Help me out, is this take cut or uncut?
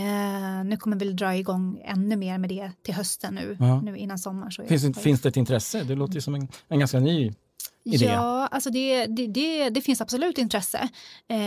uncut